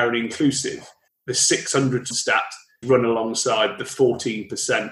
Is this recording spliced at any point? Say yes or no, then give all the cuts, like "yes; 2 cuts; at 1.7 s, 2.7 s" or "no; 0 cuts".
yes; 3 cuts; at 1.1 s, 2.1 s, 2.8 s